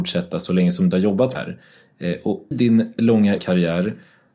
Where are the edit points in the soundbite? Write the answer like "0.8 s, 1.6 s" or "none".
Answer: 0.9 s, 1.3 s, 2.5 s, 3.4 s